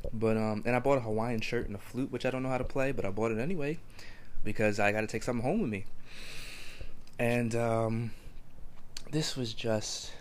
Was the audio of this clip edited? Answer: no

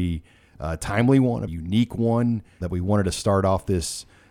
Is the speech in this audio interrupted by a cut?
yes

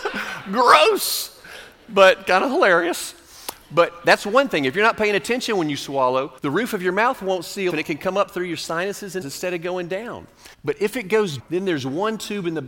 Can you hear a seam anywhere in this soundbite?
yes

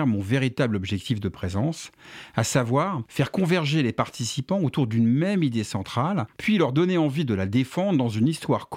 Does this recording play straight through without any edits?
yes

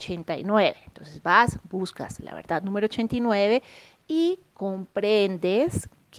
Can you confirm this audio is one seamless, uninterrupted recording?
yes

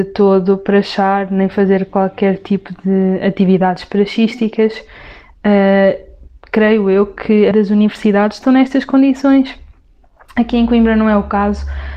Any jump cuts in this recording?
yes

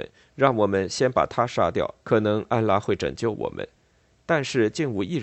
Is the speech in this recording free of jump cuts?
no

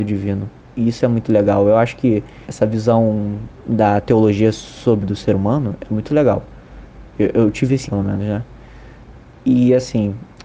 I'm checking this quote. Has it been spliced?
yes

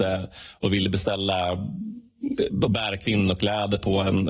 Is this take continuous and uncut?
yes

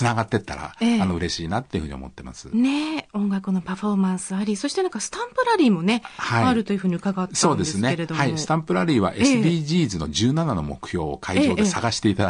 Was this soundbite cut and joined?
no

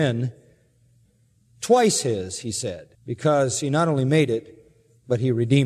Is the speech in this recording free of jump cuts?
no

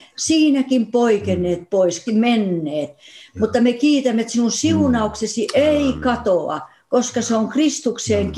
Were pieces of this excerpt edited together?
yes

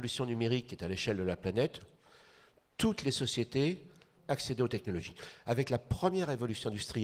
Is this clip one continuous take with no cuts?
no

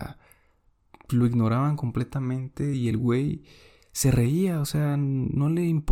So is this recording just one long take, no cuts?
yes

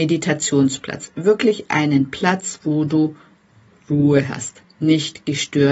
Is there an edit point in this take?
no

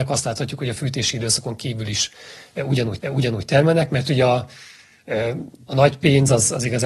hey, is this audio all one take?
no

